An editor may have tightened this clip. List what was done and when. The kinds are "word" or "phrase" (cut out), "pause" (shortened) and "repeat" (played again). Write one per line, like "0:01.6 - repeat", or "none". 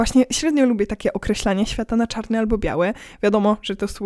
none